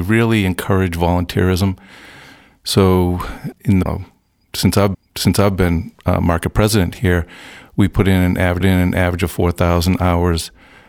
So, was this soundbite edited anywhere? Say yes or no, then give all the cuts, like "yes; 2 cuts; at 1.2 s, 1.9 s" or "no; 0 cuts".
yes; 4 cuts; at 3.5 s, 3.9 s, 4.9 s, 8.6 s